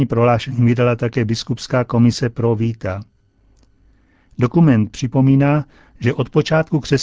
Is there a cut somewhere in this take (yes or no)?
no